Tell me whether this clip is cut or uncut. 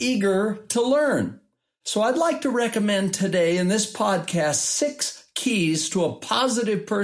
uncut